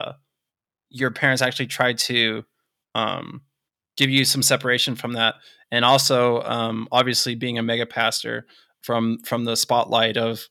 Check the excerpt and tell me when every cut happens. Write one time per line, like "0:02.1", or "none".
none